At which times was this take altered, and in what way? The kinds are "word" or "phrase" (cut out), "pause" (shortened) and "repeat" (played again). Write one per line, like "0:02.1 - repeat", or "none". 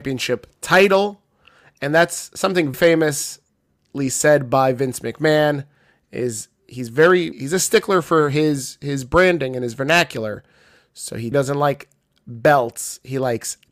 0:02.7 - word
0:07.3 - word
0:11.3 - word